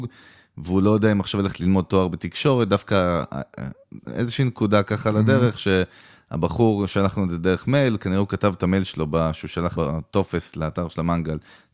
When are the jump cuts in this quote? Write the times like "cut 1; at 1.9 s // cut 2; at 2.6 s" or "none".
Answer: cut 1; at 4.0 s // cut 2; at 9.8 s